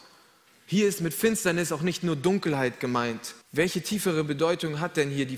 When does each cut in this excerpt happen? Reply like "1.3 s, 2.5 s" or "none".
3.4 s